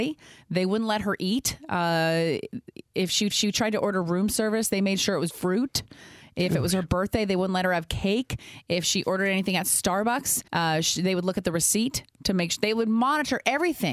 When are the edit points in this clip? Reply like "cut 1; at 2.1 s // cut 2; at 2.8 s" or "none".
cut 1; at 3.3 s // cut 2; at 5.3 s // cut 3; at 10.5 s